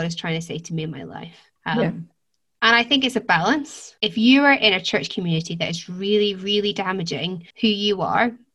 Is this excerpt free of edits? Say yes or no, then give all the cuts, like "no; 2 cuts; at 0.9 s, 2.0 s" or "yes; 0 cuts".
no; 3 cuts; at 1.6 s, 4.0 s, 7.5 s